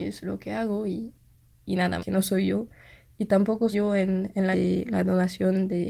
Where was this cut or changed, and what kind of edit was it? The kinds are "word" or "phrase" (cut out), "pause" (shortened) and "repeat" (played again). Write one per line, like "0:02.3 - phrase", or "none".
0:01.5 - word
0:02.0 - word
0:03.7 - word
0:04.5 - word